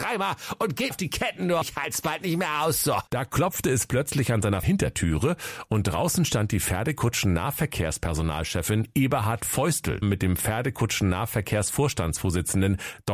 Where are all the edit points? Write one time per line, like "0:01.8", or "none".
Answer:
0:00.9
0:01.6
0:03.1
0:04.6
0:10.0